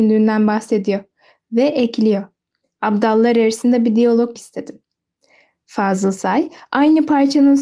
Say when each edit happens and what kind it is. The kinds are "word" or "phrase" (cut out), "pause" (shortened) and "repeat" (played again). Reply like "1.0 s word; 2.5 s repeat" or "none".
4.4 s word

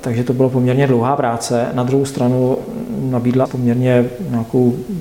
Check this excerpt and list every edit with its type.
3.4 s word

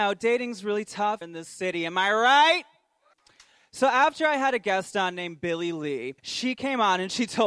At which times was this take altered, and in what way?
1.2 s word; 3.1 s pause; 6.2 s pause

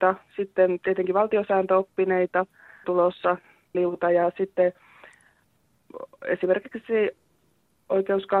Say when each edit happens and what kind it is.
2.8 s word; 3.7 s word

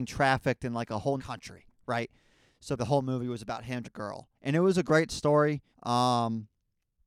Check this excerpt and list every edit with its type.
1.2 s word; 2.8 s word; 3.8 s phrase; 4.3 s pause; 5.7 s pause

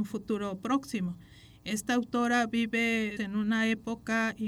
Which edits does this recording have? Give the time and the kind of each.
3.2 s word

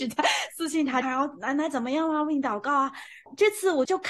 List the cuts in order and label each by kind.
1.0 s phrase

